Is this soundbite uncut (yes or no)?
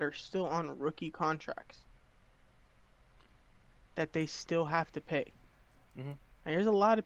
yes